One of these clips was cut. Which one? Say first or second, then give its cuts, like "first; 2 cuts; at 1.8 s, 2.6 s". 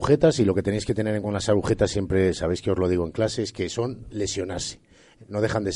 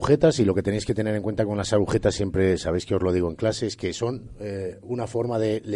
first; 2 cuts; at 1.2 s, 4.1 s